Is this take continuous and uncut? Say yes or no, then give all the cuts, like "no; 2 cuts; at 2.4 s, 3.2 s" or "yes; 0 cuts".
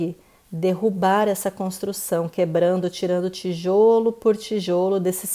yes; 0 cuts